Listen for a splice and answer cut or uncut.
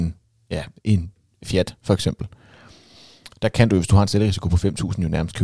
uncut